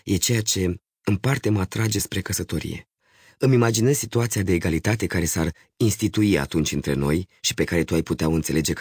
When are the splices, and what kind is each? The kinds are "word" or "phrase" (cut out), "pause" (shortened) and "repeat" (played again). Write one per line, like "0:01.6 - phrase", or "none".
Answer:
none